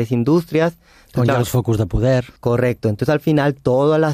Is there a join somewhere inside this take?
yes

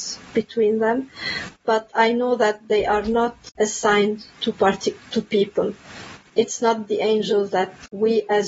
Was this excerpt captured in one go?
yes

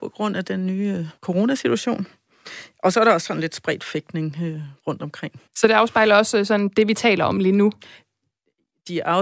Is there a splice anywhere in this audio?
yes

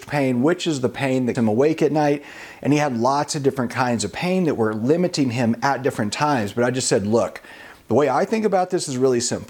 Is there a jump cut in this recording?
yes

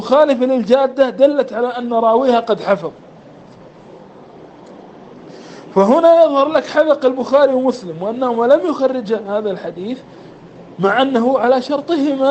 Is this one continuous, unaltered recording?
yes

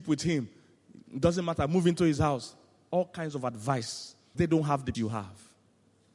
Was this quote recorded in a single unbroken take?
no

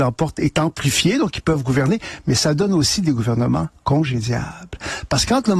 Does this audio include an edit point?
yes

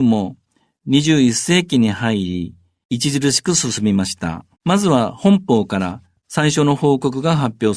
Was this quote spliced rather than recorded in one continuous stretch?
yes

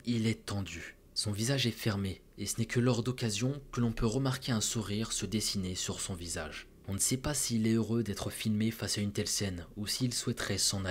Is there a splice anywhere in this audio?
no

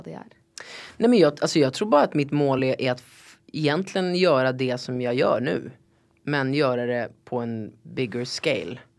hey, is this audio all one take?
yes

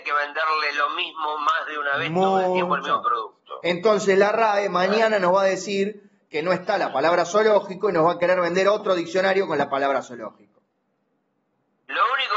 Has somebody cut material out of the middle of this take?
no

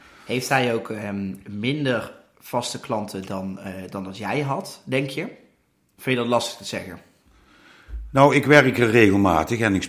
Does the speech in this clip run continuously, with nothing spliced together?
yes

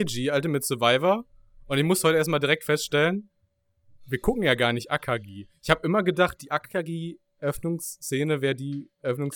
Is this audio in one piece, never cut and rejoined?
yes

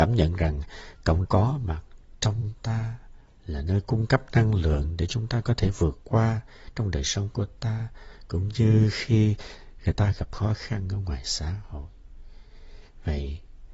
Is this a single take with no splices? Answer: no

